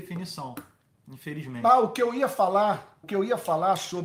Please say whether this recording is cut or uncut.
cut